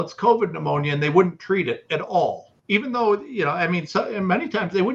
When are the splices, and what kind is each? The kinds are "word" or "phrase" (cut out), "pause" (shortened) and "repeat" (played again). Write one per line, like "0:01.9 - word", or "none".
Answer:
0:02.6 - pause